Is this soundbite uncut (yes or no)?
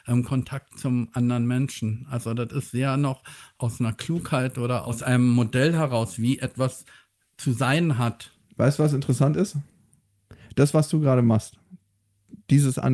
yes